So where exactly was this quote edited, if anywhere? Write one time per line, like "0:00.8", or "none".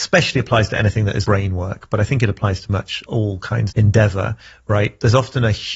0:01.2
0:02.7
0:03.1
0:03.7

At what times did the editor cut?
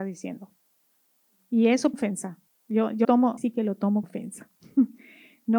0:01.9
0:02.5
0:03.0
0:03.4
0:04.0

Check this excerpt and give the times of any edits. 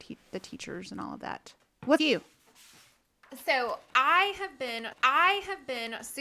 0:02.0
0:04.9

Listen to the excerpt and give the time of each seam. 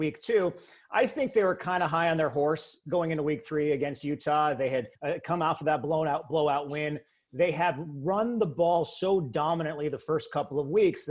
0:04.9

